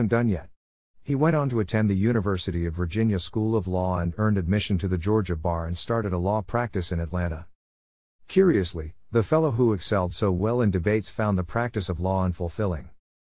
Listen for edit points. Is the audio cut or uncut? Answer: uncut